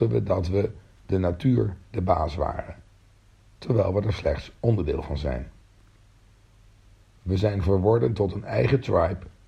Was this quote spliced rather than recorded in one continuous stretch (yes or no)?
no